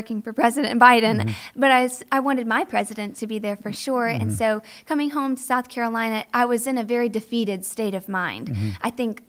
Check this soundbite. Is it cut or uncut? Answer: uncut